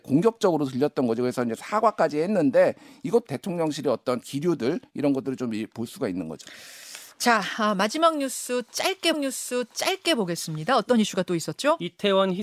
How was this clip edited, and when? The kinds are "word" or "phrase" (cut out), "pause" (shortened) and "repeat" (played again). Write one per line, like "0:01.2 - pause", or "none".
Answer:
0:03.3 - word
0:09.1 - repeat